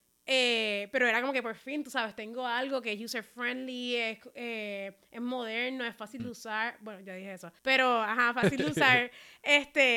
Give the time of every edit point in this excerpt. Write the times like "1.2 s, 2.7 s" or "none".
7.6 s